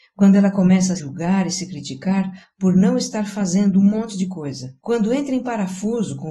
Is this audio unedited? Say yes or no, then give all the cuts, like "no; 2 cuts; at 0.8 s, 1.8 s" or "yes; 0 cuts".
no; 2 cuts; at 1.0 s, 4.8 s